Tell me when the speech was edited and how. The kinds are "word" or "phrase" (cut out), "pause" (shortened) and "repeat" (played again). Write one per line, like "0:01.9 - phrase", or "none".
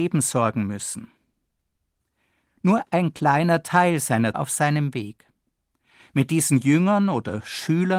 0:04.3 - phrase